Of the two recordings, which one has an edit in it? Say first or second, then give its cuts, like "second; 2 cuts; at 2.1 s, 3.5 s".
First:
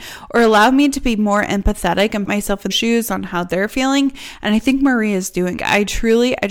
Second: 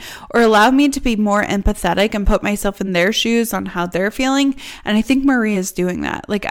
first; 3 cuts; at 2.3 s, 2.7 s, 5.6 s